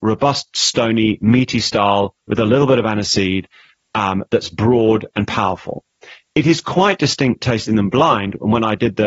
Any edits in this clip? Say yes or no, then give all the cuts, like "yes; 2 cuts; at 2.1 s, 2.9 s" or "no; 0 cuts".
no; 0 cuts